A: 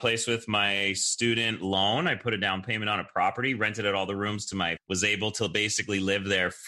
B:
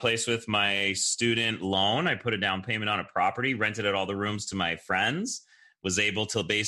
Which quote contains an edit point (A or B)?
A